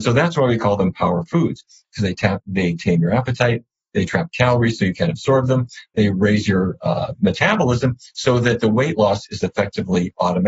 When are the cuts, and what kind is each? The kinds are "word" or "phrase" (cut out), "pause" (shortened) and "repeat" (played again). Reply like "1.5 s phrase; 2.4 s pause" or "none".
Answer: none